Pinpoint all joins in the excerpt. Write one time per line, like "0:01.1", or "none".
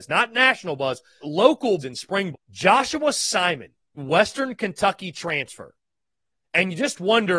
0:01.2
0:01.8
0:02.3
0:04.0